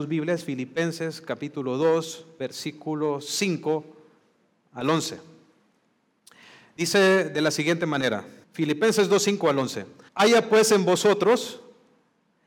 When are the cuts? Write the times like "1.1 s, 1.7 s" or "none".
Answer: 8.4 s, 10.1 s